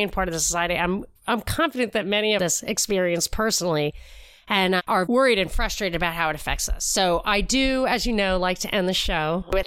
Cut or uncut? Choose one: cut